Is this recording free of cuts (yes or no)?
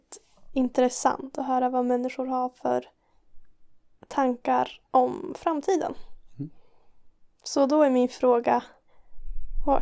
no